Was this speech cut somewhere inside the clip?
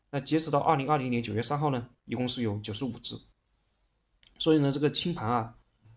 yes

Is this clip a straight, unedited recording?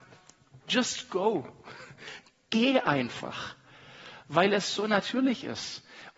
yes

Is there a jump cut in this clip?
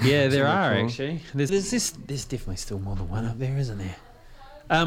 yes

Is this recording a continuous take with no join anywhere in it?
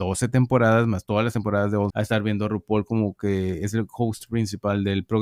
no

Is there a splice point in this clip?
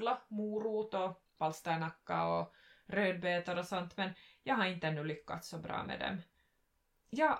no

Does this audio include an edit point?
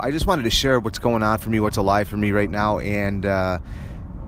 no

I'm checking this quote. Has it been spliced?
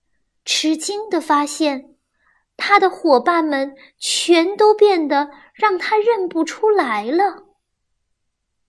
no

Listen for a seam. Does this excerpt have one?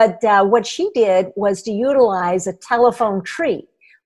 no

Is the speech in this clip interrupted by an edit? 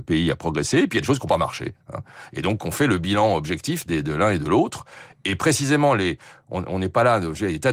no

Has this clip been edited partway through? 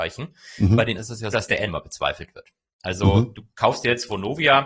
yes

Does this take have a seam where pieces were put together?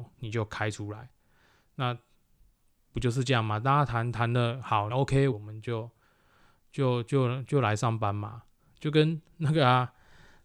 yes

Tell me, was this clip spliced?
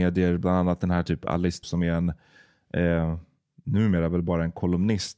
yes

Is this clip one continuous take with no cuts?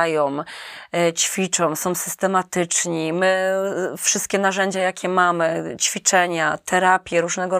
yes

